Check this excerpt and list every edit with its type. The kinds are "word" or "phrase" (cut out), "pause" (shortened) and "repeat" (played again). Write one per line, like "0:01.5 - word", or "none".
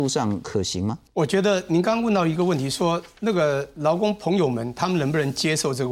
0:01.1 - pause